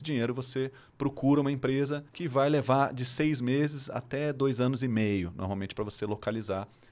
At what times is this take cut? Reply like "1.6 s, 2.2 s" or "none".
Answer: 2.1 s